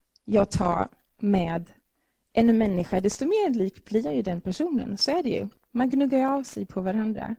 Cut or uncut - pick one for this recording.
uncut